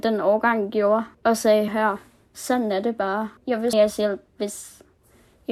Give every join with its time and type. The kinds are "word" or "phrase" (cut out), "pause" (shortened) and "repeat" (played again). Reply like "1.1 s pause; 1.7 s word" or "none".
1.1 s pause; 1.7 s word; 3.4 s pause; 3.7 s phrase